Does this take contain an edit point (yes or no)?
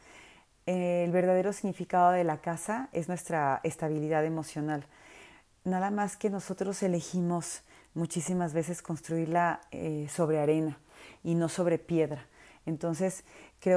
no